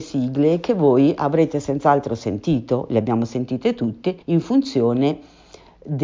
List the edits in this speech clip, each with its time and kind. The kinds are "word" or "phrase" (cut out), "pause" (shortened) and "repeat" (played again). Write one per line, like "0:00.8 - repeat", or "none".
0:04.2 - pause